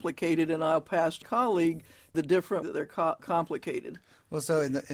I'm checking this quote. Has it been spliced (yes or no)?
yes